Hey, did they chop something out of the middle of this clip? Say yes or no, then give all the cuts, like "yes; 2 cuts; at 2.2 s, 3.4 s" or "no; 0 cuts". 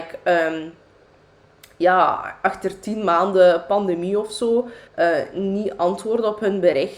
yes; 1 cut; at 4.9 s